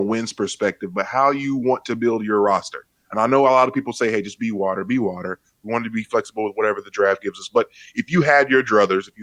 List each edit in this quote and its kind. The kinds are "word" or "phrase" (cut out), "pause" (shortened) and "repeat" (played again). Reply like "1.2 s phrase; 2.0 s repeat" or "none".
none